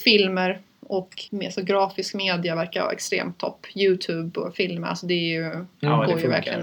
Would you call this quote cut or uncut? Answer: cut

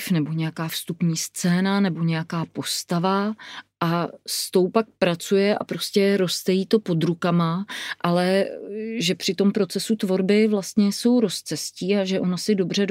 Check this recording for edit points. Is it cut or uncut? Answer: uncut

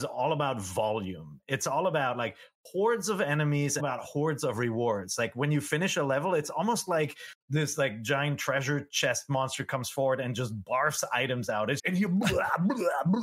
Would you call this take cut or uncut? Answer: cut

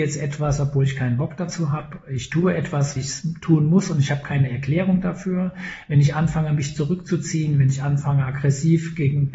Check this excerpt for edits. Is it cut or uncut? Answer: cut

